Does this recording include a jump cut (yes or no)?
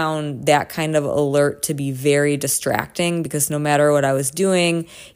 no